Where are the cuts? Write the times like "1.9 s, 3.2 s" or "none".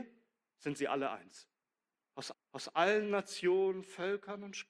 2.3 s